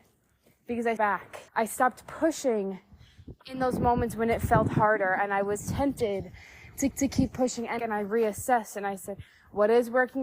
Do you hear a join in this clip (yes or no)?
yes